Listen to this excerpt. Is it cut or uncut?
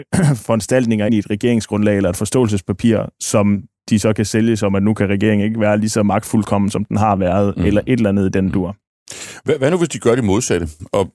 cut